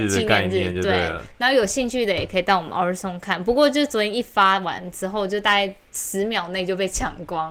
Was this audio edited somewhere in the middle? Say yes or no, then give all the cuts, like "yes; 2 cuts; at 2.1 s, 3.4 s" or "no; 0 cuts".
no; 0 cuts